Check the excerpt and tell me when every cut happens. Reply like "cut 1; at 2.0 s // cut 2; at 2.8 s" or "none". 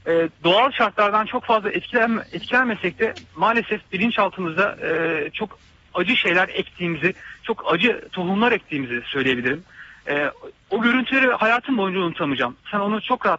cut 1; at 3.3 s